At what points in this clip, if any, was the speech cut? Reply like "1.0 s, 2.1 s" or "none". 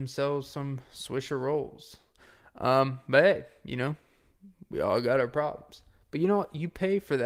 none